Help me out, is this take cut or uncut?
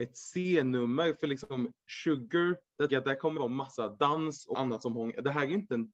cut